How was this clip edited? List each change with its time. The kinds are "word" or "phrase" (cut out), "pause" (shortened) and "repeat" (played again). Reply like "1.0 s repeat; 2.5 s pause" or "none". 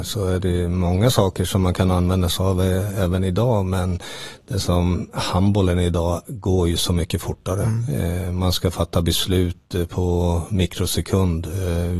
none